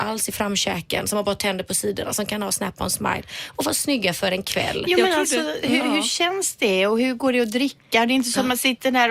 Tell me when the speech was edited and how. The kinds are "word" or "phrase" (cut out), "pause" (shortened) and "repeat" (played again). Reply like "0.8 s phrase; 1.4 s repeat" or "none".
none